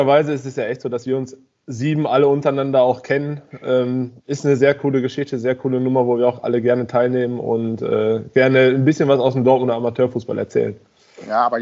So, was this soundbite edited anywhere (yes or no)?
no